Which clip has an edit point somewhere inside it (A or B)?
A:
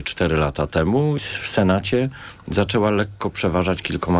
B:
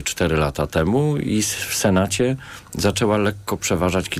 A